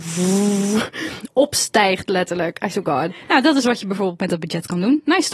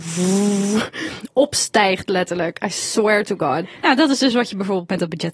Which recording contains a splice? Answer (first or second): first